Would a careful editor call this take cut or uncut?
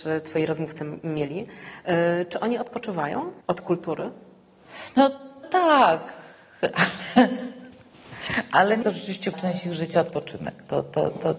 cut